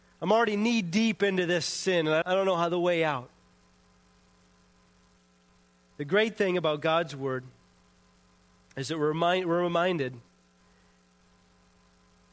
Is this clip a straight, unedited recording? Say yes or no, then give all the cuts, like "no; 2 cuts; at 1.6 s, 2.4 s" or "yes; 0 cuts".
no; 1 cut; at 2.2 s